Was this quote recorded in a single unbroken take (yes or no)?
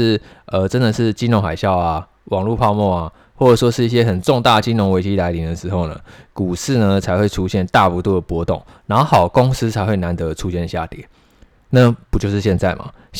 yes